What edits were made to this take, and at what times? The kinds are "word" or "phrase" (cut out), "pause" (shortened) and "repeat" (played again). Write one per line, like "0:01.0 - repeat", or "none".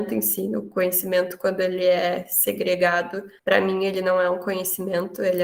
0:03.4 - pause